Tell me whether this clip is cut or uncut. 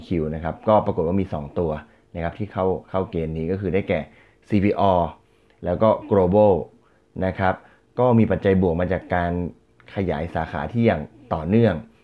uncut